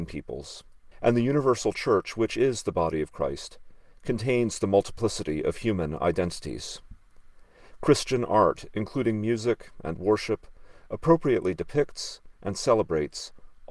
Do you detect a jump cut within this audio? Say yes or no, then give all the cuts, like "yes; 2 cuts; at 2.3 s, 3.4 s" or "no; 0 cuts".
yes; 1 cut; at 0.9 s